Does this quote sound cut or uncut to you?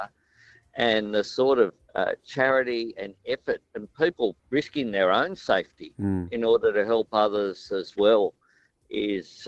cut